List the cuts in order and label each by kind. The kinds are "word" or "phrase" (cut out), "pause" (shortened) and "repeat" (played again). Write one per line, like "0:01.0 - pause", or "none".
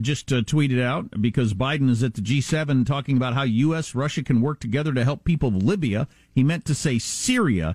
none